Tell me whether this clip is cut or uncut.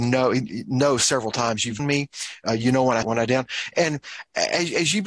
cut